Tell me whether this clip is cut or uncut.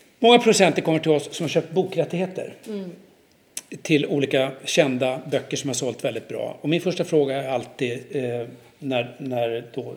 uncut